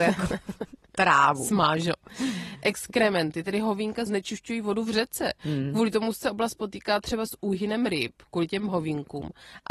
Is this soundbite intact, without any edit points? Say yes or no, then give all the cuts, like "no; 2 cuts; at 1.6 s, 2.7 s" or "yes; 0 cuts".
no; 1 cut; at 4.1 s